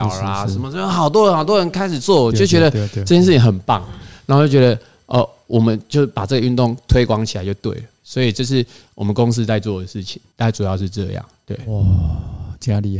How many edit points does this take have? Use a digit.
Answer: 1